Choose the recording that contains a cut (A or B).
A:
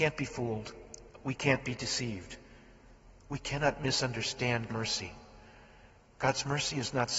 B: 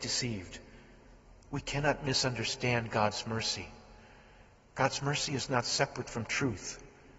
A